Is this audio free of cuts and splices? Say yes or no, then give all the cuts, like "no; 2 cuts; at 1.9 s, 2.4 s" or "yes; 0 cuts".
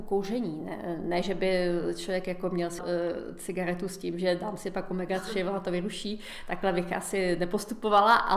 no; 1 cut; at 2.8 s